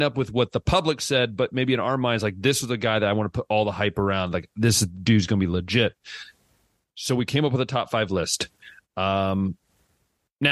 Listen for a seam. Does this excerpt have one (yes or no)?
no